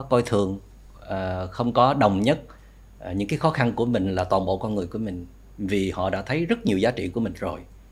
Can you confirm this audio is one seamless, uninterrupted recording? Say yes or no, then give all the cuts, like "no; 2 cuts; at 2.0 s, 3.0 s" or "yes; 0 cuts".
yes; 0 cuts